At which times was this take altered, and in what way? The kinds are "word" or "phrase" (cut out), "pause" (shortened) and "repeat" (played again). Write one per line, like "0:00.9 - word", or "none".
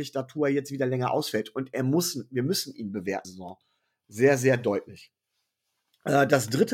0:03.2 - phrase